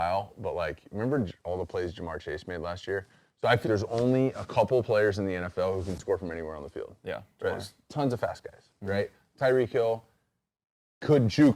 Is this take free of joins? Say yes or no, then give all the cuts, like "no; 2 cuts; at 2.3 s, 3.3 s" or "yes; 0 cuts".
no; 1 cut; at 3.6 s